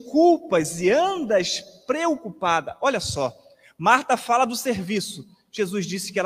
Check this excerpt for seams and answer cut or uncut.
uncut